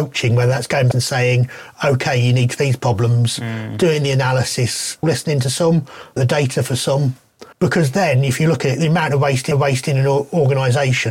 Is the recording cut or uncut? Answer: cut